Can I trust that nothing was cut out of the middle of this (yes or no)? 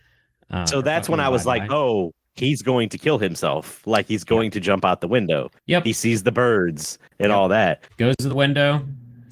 no